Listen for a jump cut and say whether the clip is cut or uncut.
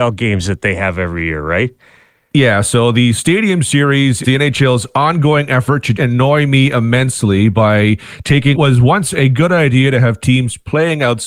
cut